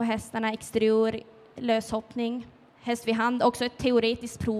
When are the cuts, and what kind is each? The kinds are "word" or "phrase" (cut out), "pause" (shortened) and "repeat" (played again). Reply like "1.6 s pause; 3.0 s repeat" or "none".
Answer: none